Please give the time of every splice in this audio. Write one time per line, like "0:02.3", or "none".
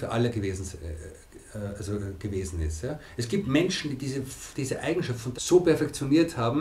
0:05.3

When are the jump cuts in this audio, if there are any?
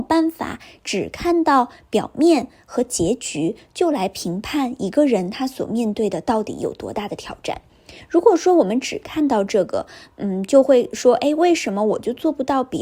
none

